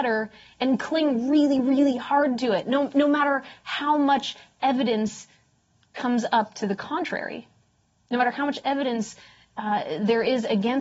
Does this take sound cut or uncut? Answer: uncut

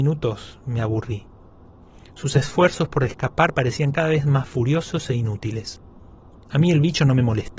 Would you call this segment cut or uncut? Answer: uncut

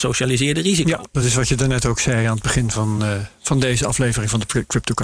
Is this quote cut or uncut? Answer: uncut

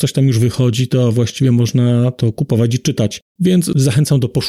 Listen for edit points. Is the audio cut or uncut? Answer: cut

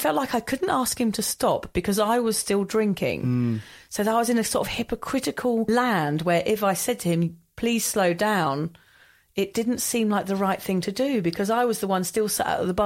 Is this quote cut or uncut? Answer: uncut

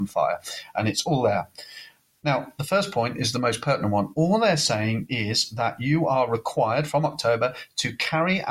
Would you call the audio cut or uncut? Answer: uncut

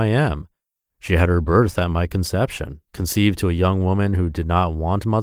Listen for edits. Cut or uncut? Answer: cut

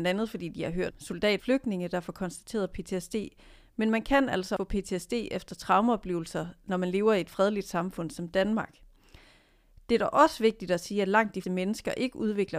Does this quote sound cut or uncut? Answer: cut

